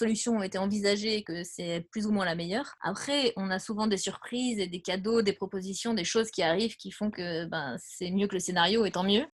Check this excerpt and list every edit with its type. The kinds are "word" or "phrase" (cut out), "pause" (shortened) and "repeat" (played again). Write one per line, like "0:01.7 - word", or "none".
none